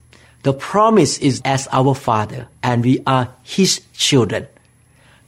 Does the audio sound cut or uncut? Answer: cut